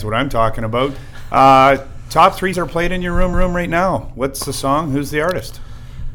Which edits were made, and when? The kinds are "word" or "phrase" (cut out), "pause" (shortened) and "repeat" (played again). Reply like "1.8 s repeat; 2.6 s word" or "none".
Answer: 2.5 s word; 3.3 s repeat